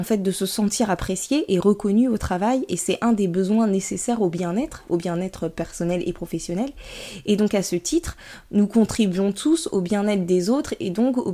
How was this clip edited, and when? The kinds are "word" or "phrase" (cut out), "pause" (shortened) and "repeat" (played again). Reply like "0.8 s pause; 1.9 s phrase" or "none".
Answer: none

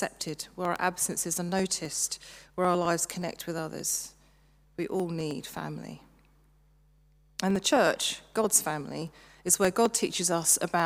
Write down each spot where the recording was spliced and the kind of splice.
none

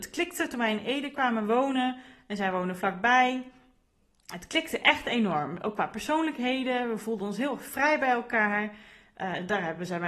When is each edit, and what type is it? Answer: none

